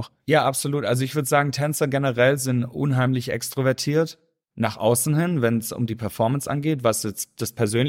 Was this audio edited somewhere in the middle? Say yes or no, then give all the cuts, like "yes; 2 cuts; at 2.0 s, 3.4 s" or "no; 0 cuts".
no; 0 cuts